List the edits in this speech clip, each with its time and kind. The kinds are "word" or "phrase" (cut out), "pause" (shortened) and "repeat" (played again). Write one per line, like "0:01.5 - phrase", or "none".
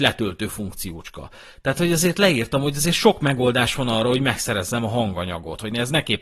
none